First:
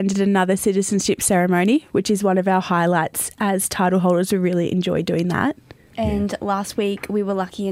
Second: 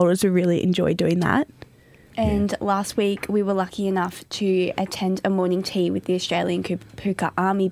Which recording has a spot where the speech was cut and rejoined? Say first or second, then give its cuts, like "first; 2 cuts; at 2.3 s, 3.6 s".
first; 1 cut; at 5.8 s